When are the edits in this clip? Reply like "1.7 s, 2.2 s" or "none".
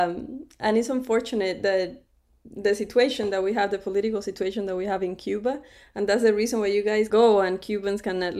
7.1 s